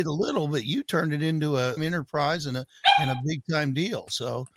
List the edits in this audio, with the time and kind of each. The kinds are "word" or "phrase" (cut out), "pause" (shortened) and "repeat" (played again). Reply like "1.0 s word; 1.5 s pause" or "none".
1.8 s phrase

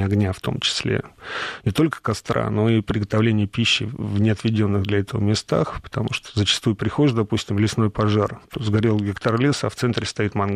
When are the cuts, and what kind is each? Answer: 8.4 s pause

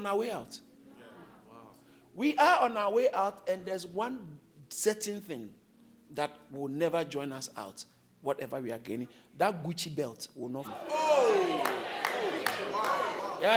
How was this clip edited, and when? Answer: 10.6 s word

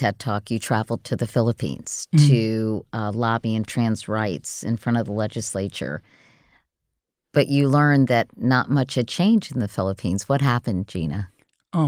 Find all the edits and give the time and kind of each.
3.7 s phrase

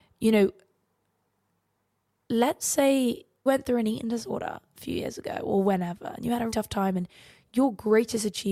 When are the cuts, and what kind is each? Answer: 3.5 s word; 6.5 s word

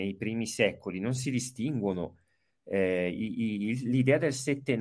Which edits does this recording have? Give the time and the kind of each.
none

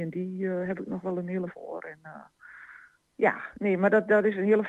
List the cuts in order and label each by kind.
1.5 s word

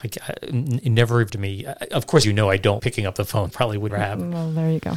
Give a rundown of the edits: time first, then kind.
1.3 s word; 2.2 s word; 2.8 s word; 3.5 s word; 3.9 s word

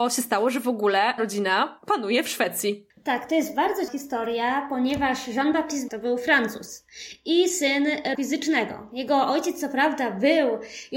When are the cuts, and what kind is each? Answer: 1.2 s word; 1.8 s word; 3.9 s word; 5.9 s word; 8.1 s word

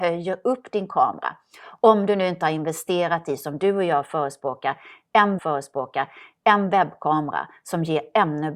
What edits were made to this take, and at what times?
5.4 s repeat

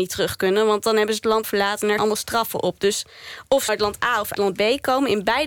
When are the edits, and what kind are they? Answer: 1.4 s word; 2.0 s word; 3.7 s word; 4.3 s word

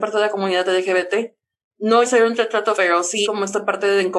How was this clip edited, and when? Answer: 2.0 s word; 2.7 s word; 3.2 s word

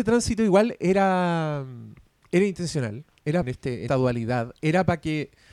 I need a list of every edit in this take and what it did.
3.4 s phrase; 3.9 s word

